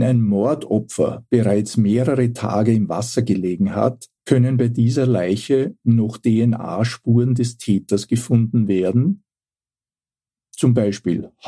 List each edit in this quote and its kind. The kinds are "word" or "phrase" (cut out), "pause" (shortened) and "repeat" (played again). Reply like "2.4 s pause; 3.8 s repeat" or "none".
4.2 s pause